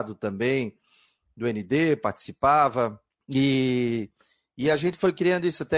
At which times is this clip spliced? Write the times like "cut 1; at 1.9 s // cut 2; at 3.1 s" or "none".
cut 1; at 3.1 s